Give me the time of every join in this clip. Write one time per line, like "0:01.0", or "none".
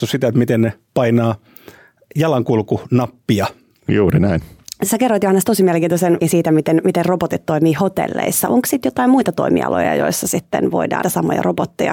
0:06.2
0:11.0